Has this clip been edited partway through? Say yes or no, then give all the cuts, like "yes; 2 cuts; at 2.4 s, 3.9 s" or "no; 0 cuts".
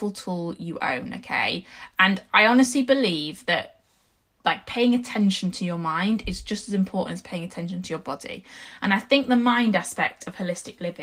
no; 0 cuts